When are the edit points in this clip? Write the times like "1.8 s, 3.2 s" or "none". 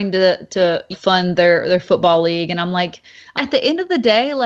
0.9 s, 3.4 s